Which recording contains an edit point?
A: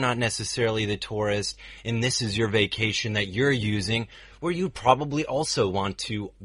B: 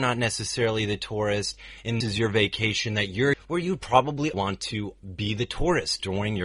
B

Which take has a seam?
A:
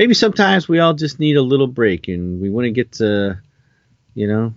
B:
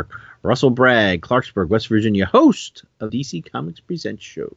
B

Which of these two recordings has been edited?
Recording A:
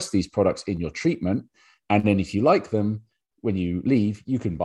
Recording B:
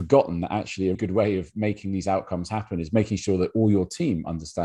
B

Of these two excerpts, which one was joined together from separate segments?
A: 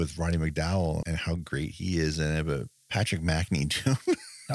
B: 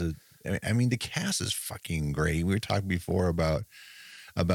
A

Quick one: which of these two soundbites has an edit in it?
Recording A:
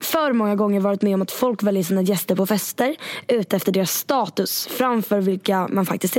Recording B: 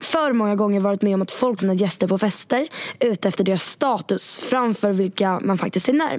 B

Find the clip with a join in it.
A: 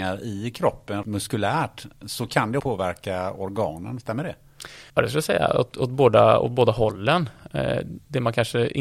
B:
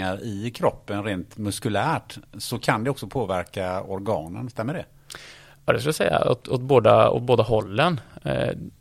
A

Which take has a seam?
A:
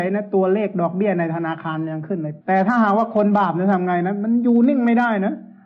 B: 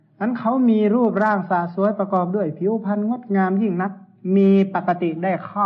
A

